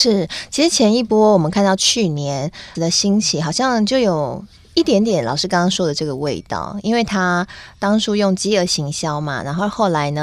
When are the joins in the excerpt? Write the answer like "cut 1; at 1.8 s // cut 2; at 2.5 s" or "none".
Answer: cut 1; at 2.7 s